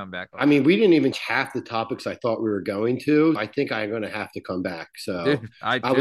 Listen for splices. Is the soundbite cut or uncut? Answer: cut